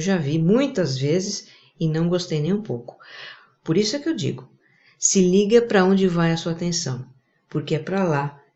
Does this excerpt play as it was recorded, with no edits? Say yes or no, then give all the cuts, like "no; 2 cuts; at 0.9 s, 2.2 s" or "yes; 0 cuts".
yes; 0 cuts